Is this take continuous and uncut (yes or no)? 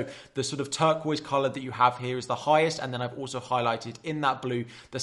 yes